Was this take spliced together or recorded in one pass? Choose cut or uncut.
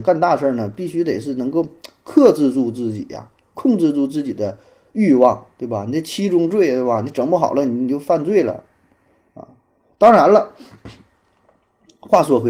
uncut